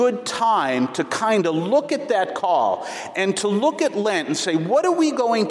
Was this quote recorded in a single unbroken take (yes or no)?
yes